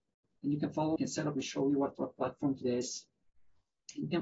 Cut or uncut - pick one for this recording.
cut